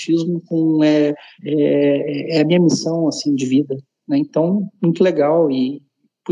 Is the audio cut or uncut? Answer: uncut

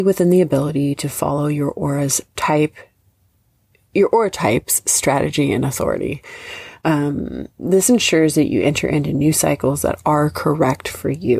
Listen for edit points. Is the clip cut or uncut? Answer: uncut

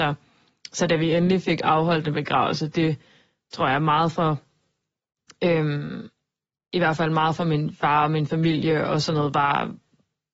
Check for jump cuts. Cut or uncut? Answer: uncut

